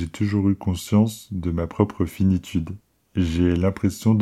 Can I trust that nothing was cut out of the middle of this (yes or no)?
yes